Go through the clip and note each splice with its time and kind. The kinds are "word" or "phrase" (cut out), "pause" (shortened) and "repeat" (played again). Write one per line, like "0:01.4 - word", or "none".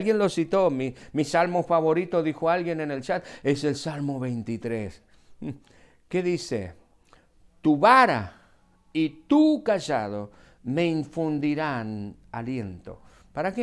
none